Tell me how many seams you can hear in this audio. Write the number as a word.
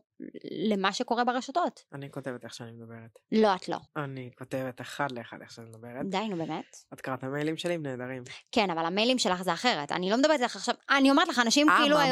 one